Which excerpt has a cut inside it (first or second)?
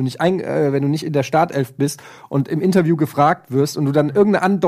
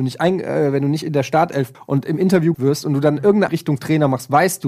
second